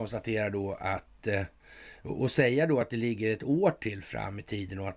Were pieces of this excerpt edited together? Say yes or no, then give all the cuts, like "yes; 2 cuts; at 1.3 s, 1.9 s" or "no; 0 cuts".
no; 0 cuts